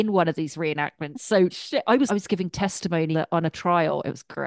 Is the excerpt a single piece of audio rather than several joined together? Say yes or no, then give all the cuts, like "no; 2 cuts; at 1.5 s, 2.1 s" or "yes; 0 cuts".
no; 3 cuts; at 1.5 s, 2.1 s, 3.1 s